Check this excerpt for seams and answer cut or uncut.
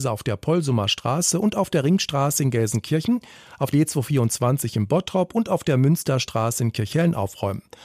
cut